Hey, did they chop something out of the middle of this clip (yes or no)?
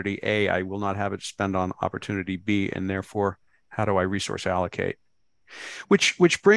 no